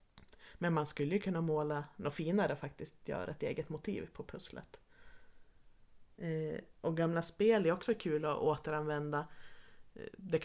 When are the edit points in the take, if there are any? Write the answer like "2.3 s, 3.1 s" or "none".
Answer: none